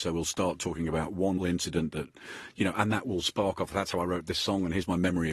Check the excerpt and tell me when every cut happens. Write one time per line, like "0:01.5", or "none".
0:01.4